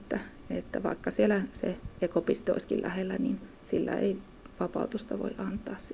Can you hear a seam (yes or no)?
no